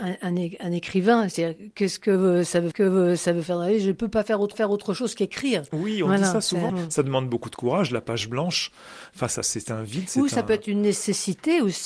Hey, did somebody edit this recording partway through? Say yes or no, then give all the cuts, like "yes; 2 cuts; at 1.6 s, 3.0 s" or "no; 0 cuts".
yes; 4 cuts; at 2.7 s, 4.5 s, 6.7 s, 9.4 s